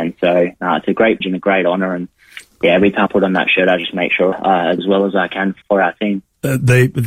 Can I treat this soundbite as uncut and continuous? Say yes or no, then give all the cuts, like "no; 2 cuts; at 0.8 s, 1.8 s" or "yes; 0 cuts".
no; 5 cuts; at 1.2 s, 3.1 s, 4.3 s, 4.8 s, 5.6 s